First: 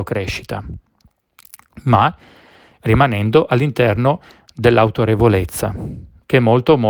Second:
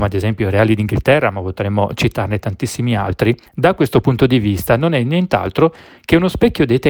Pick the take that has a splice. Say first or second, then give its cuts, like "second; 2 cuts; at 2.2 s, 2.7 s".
second; 1 cut; at 3.5 s